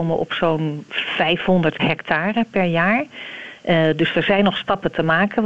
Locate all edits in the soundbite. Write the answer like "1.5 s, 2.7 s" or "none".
1.8 s